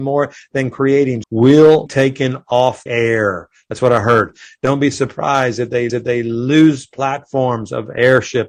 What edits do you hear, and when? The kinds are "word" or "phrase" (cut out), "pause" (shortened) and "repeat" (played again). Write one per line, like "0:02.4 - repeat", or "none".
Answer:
0:01.2 - word
0:01.9 - word
0:02.9 - word
0:05.9 - repeat